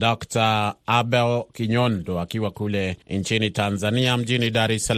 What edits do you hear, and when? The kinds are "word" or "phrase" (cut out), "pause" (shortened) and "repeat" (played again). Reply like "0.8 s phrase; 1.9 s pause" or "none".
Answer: 1.5 s pause; 3.0 s pause